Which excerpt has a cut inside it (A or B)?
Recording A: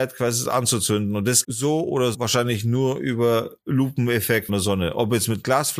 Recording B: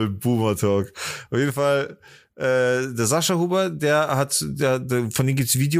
A